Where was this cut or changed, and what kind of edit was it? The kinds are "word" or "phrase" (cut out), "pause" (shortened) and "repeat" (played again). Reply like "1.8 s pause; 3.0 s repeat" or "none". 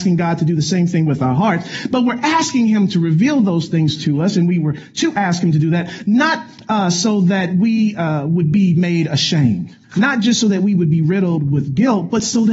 9.8 s pause

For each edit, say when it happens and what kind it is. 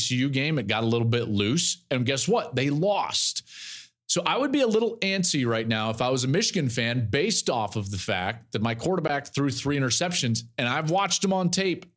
none

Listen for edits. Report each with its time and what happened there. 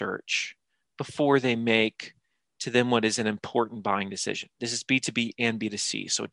none

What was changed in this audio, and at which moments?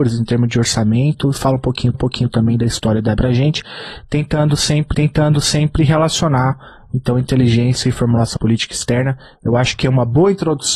1.9 s repeat; 3.2 s word; 4.9 s repeat; 8.4 s word

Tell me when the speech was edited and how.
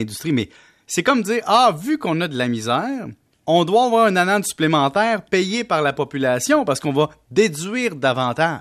3.3 s pause

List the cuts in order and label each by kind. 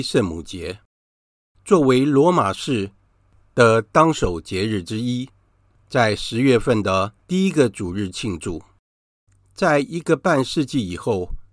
7.2 s pause

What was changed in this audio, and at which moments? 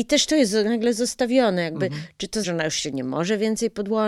2.4 s word

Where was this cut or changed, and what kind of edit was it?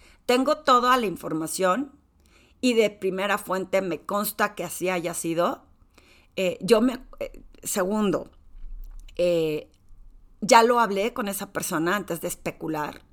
none

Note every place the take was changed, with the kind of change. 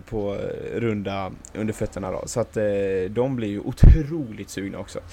none

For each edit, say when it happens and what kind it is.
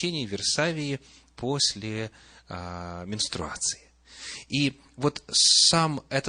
none

